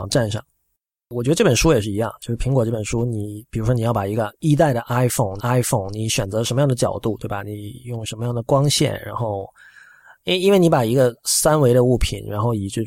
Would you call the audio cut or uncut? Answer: cut